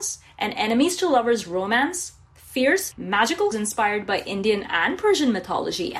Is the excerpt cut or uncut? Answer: cut